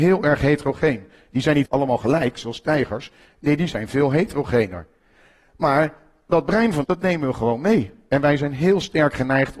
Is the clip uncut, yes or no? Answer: no